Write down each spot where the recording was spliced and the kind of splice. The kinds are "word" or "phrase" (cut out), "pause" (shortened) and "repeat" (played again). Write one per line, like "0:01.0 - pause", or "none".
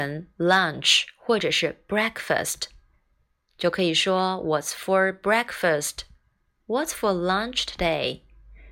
none